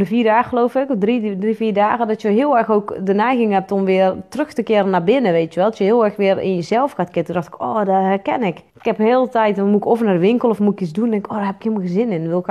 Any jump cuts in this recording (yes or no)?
yes